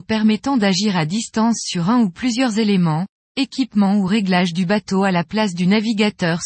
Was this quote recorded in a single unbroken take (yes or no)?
yes